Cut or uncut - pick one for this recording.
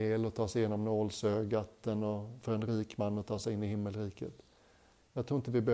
uncut